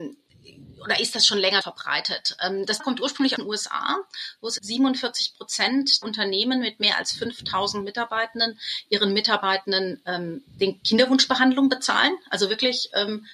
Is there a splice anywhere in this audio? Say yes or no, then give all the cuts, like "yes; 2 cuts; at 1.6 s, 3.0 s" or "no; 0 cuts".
yes; 5 cuts; at 1.6 s, 2.8 s, 3.4 s, 4.6 s, 6.0 s